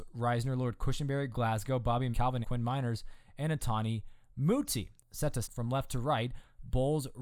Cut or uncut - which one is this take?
cut